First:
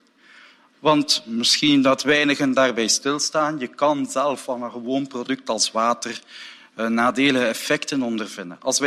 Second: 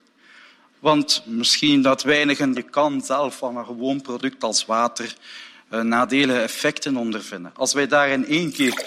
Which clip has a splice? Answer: second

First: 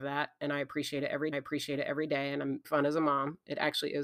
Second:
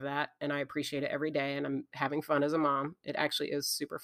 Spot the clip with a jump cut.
first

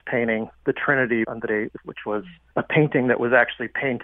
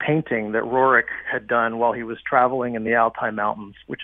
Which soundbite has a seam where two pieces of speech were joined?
first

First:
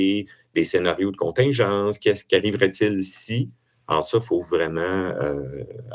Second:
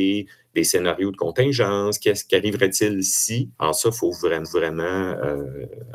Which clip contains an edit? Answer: second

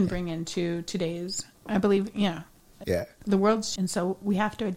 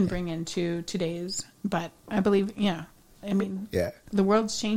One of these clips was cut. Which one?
first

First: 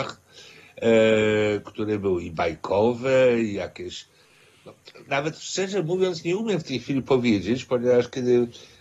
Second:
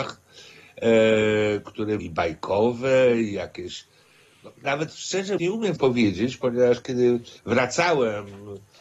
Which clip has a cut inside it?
second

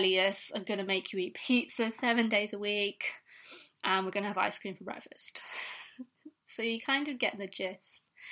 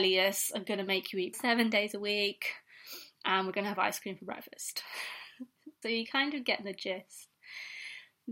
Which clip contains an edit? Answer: second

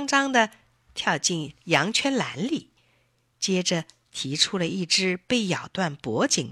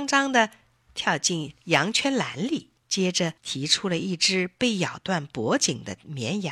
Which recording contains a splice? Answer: second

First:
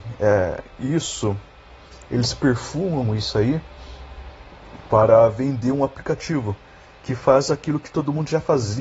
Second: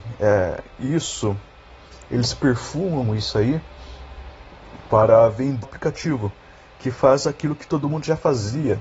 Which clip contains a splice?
second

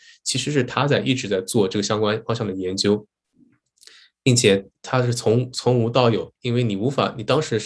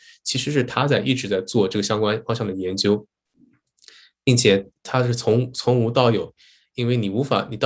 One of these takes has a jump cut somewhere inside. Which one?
first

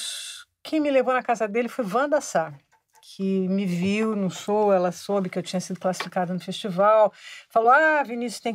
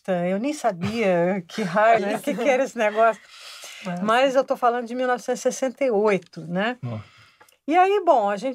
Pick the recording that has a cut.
second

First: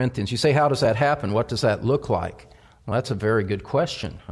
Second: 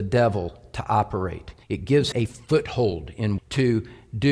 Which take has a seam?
second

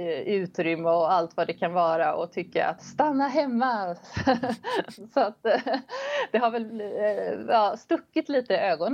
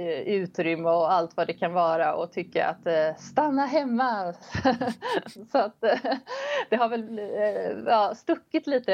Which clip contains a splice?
first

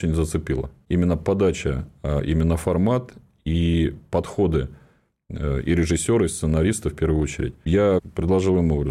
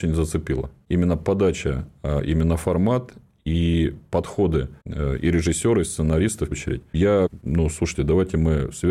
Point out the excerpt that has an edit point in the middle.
second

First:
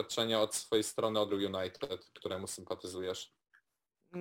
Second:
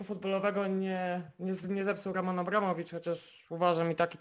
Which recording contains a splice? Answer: first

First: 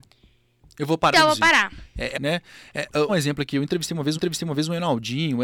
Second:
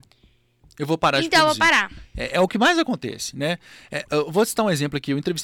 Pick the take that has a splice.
first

